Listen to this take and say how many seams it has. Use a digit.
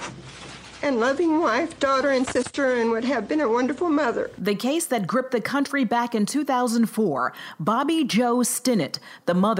0